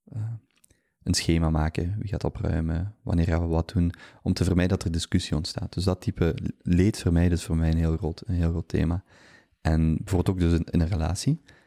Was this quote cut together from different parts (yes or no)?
no